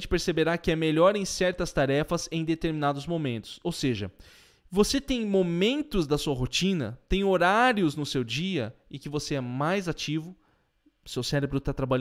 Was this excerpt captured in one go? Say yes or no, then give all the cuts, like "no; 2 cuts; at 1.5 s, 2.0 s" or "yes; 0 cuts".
yes; 0 cuts